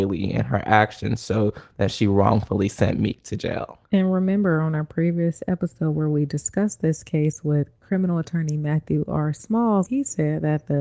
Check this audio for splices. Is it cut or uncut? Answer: cut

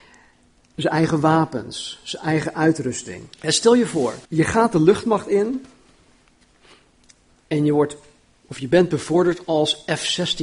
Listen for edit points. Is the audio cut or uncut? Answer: cut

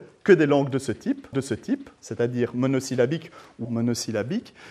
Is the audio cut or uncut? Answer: cut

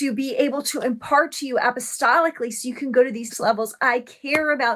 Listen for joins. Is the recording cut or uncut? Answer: cut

